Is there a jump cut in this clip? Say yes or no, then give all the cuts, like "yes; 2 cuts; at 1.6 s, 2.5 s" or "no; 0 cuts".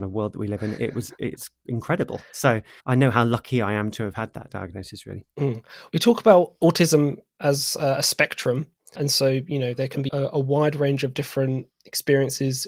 yes; 3 cuts; at 2.8 s, 9.0 s, 10.1 s